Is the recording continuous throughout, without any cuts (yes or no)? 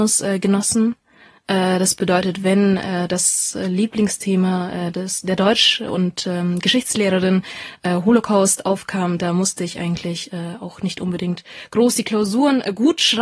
yes